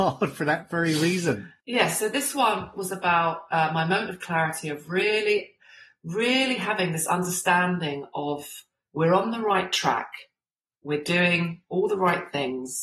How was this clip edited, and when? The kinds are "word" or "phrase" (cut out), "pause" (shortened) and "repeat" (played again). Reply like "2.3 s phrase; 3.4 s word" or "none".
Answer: none